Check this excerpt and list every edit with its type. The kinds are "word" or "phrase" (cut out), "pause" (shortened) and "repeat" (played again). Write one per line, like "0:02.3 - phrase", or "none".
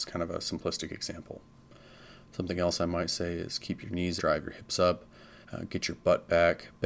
0:04.2 - word
0:05.4 - pause